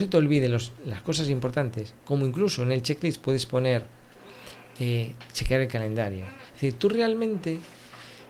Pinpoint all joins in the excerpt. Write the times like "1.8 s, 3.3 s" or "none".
2.0 s